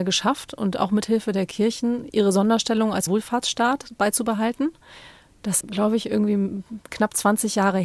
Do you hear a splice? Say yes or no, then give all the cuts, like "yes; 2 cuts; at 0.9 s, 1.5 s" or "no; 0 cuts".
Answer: yes; 2 cuts; at 3.1 s, 5.6 s